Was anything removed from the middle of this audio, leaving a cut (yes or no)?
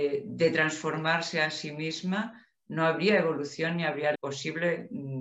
yes